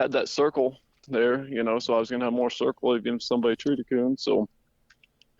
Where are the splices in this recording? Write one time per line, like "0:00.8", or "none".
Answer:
none